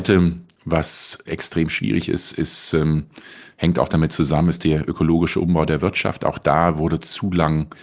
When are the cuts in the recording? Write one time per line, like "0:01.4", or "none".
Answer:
0:01.2